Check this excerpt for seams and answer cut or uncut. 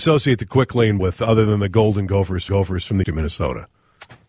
cut